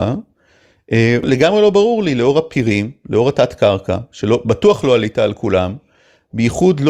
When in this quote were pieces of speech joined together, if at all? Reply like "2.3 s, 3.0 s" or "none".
none